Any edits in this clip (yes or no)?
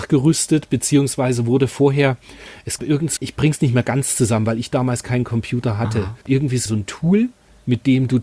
yes